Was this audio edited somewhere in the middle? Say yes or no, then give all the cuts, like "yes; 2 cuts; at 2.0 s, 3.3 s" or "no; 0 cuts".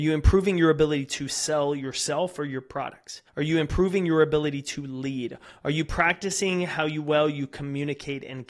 yes; 1 cut; at 3.3 s